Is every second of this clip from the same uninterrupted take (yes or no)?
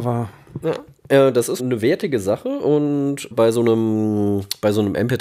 no